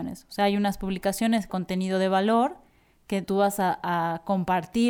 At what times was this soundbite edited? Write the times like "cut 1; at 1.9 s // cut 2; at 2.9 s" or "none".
cut 1; at 1.5 s // cut 2; at 3.2 s